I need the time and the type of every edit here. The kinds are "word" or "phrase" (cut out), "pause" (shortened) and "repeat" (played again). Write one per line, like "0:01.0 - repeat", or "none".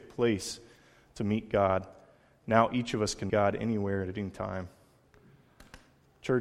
0:03.3 - word